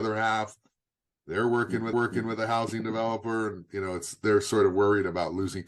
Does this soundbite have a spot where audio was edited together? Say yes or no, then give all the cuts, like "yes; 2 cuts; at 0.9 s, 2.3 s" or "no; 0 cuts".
yes; 1 cut; at 1.9 s